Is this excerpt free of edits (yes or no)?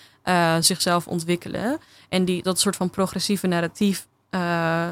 yes